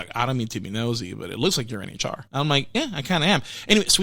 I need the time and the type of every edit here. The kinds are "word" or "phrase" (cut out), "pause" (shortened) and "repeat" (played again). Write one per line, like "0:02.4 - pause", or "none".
0:02.3 - pause